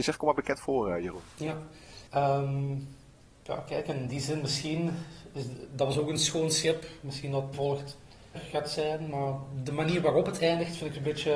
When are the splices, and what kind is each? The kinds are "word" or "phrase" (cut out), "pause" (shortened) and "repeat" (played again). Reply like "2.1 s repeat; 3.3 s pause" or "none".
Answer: 2.1 s pause; 7.5 s phrase; 8.3 s phrase